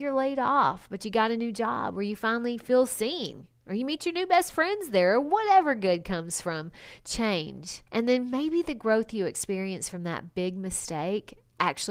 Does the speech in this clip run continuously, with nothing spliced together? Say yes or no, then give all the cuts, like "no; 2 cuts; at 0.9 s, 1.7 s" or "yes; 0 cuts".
no; 1 cut; at 7.9 s